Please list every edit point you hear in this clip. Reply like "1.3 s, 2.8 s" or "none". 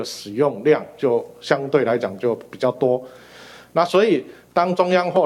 none